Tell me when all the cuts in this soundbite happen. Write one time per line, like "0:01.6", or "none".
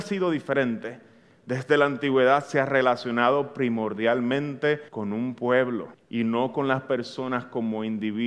0:04.9
0:05.9

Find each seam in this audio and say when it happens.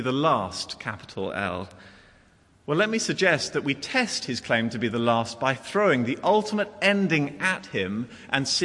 none

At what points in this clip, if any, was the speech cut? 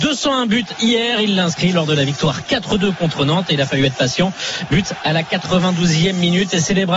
none

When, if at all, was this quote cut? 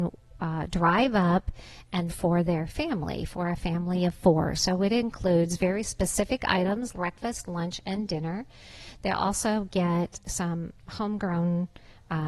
0:02.1
0:06.9
0:10.2

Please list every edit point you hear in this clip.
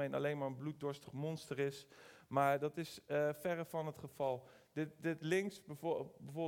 none

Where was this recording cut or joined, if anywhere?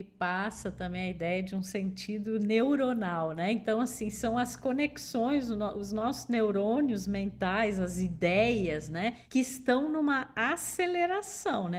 none

